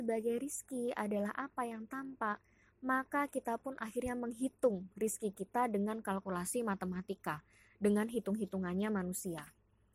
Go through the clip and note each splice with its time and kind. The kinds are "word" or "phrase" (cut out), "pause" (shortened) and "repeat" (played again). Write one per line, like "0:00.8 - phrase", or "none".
none